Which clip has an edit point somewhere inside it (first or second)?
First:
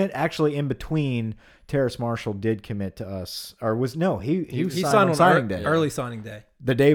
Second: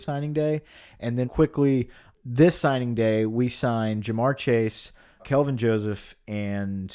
second